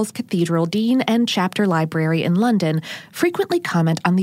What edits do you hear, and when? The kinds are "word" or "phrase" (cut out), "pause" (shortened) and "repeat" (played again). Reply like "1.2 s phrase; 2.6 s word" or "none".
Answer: none